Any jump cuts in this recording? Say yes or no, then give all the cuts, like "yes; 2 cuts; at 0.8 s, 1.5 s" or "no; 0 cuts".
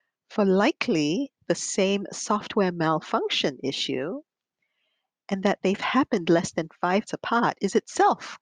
yes; 1 cut; at 7.1 s